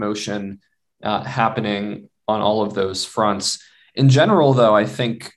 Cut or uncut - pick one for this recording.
uncut